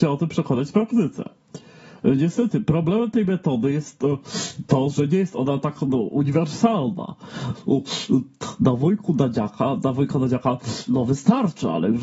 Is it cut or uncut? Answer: uncut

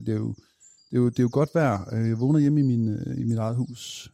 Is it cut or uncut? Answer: uncut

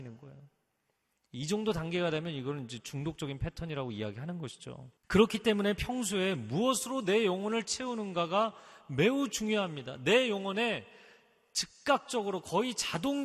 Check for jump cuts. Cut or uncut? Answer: cut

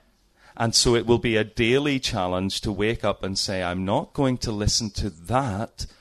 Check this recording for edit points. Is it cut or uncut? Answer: uncut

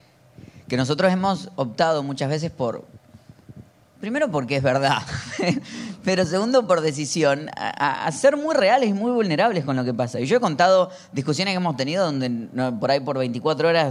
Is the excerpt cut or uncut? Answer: uncut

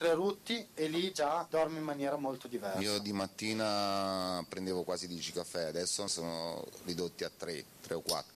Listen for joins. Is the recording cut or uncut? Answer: cut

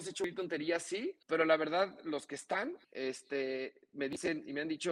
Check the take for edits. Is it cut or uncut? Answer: cut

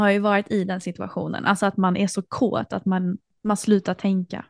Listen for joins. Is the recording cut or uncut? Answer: uncut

